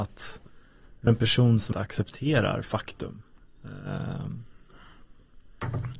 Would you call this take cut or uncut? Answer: cut